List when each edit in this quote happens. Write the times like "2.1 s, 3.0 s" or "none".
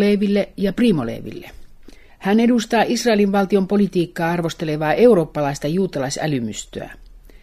2.1 s